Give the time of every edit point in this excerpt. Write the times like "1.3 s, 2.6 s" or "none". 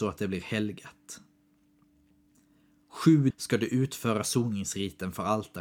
3.3 s